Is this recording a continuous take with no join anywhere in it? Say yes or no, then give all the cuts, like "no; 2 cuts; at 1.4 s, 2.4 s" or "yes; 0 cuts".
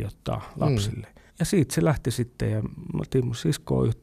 no; 1 cut; at 1.3 s